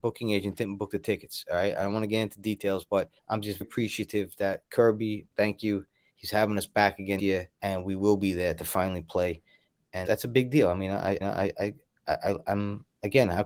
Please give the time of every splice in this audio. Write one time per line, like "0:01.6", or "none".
0:03.2
0:03.6
0:05.3
0:07.2
0:07.5
0:10.1
0:11.2